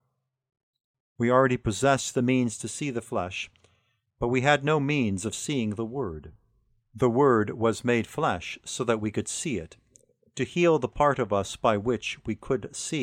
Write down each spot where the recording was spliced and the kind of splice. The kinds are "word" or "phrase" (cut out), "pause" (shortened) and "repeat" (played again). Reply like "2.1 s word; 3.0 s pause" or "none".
none